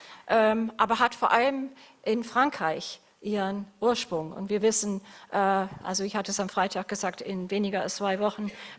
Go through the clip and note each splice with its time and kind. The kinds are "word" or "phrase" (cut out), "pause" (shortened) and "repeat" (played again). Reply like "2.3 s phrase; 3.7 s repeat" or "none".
none